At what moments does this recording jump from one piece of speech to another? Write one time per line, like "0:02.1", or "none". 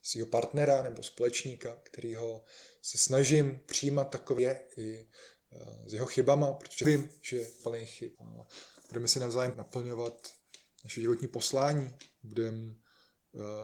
0:04.4
0:06.8
0:07.6
0:08.1
0:09.5